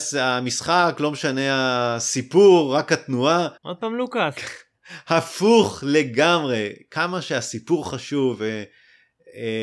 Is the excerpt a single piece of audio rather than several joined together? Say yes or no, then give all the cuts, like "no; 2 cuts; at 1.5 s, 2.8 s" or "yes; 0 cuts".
no; 1 cut; at 3.6 s